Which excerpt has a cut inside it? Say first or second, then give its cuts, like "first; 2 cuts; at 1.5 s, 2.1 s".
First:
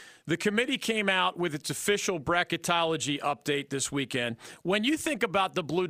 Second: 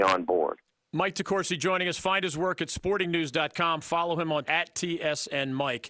second; 1 cut; at 4.4 s